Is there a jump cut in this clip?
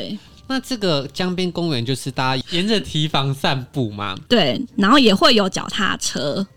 yes; 1 cut; at 4.3 s

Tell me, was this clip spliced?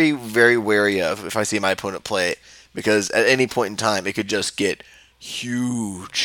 no; 0 cuts

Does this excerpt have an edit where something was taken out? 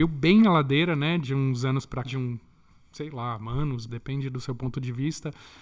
yes; 2 cuts; at 2.0 s, 3.9 s

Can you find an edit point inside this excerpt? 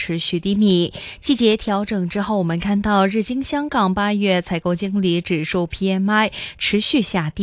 no; 0 cuts

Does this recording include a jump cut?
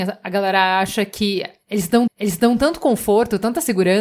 yes; 1 cut; at 2.1 s

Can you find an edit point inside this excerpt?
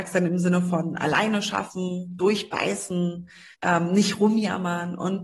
yes; 1 cut; at 3.5 s

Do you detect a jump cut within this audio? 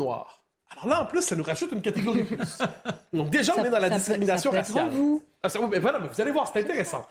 no; 0 cuts

